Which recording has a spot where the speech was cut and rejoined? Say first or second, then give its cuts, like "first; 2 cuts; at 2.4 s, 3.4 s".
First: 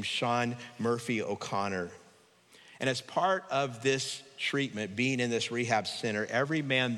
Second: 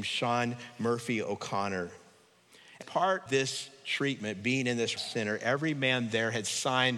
second; 3 cuts; at 2.8 s, 3.3 s, 5.0 s